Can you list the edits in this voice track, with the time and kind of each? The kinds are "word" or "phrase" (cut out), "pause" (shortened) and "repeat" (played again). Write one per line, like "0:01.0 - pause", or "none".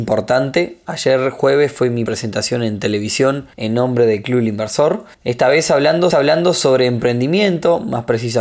0:02.1 - word
0:03.5 - pause
0:05.1 - pause
0:06.1 - repeat